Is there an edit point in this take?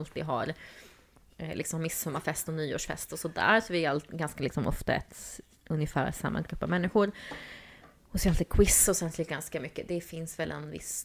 no; 0 cuts

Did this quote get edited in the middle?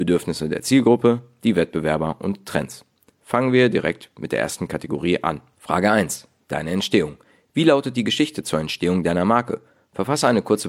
no; 0 cuts

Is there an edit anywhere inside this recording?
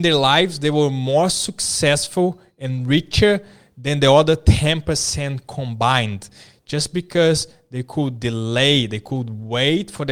no; 0 cuts

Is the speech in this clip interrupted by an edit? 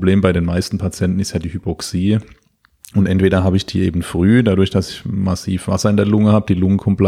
no; 0 cuts

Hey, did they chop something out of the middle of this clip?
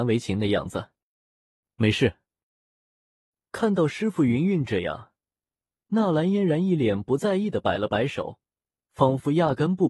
no; 0 cuts

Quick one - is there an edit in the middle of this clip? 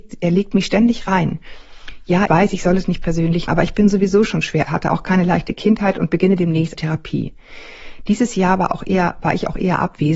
yes; 4 cuts; at 2.3 s, 3.5 s, 4.6 s, 6.7 s

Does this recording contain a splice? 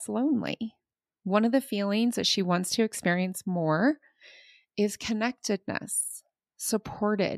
no; 0 cuts

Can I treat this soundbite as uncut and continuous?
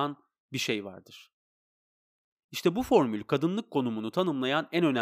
yes; 0 cuts

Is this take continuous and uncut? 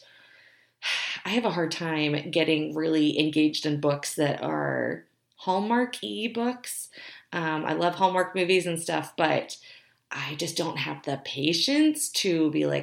yes; 0 cuts

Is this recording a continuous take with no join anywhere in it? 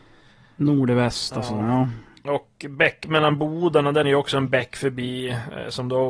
no; 1 cut; at 4.0 s

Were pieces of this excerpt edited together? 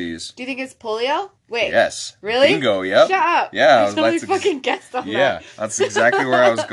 yes; 1 cut; at 1.4 s

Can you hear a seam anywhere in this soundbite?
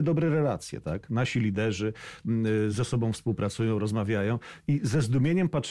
no; 0 cuts

